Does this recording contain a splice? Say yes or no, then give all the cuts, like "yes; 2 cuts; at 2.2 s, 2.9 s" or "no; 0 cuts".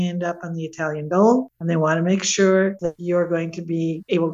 no; 0 cuts